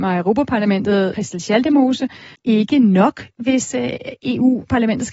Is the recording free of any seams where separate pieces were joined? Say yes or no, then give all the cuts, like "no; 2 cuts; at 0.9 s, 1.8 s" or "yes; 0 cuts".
no; 2 cuts; at 1.1 s, 2.3 s